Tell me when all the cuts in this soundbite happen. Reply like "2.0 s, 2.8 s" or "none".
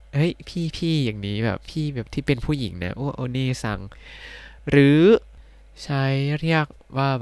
4.6 s